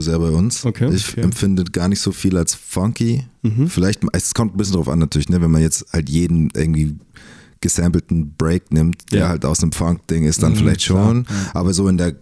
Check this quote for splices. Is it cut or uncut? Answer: uncut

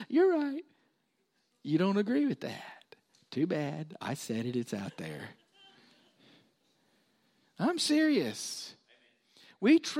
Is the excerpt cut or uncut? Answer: uncut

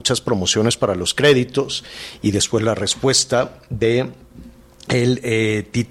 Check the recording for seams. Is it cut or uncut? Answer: uncut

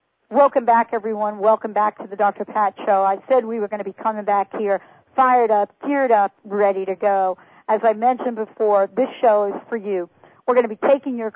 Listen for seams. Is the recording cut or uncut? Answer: uncut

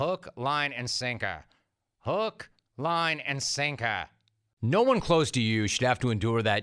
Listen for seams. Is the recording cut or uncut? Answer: uncut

